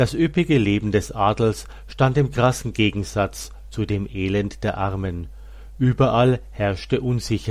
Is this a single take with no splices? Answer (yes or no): yes